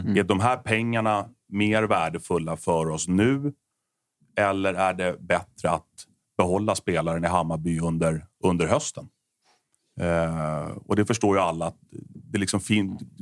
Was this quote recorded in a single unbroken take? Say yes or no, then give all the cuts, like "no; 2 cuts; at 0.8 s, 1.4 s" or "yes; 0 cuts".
yes; 0 cuts